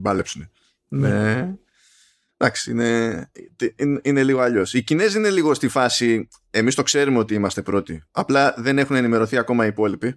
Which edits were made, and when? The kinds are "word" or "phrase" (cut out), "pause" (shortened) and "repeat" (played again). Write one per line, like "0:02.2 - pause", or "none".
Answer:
none